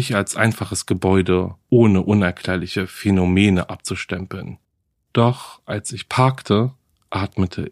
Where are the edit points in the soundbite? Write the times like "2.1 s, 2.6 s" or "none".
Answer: none